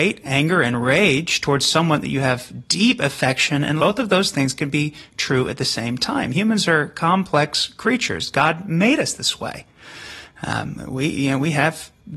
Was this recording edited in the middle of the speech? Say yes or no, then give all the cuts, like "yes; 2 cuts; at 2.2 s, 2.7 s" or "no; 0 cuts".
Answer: yes; 1 cut; at 3.8 s